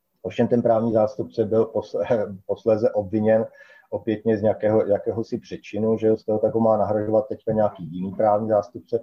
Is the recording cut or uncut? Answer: uncut